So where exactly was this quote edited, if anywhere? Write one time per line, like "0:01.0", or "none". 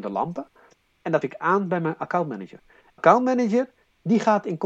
0:01.2
0:03.0